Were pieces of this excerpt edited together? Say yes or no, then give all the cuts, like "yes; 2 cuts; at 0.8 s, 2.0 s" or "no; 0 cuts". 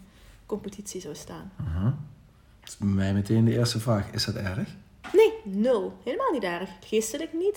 no; 0 cuts